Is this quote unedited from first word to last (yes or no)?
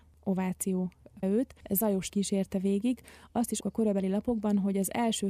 no